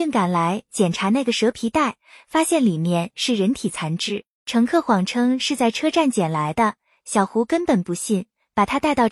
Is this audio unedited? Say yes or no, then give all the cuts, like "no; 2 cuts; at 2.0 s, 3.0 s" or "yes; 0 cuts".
yes; 0 cuts